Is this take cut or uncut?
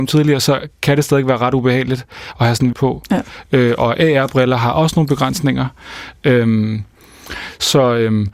cut